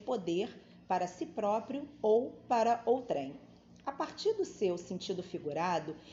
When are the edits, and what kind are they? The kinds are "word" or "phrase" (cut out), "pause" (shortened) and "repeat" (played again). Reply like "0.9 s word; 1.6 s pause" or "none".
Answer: none